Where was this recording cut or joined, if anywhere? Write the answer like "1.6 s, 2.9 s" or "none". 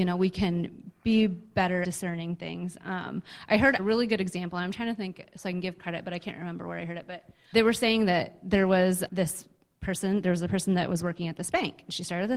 1.8 s, 3.8 s, 7.5 s, 9.1 s